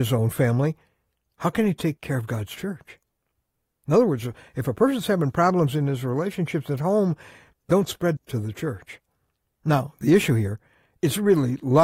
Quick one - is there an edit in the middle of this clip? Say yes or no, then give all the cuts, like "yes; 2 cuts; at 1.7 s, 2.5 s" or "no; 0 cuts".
yes; 1 cut; at 8.2 s